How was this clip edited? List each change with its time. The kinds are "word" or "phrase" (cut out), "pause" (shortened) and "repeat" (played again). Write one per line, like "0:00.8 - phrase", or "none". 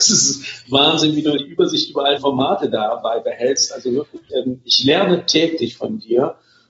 0:01.4 - word
0:02.2 - word
0:04.3 - word